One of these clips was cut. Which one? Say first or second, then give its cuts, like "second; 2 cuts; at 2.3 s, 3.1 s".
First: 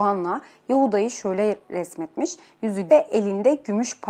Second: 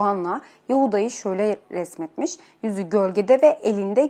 first; 1 cut; at 2.9 s